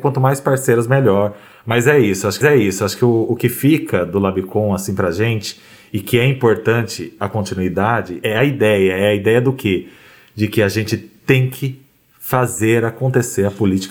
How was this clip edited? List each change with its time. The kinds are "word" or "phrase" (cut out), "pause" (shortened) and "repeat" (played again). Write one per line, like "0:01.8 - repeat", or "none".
0:02.4 - repeat
0:08.2 - word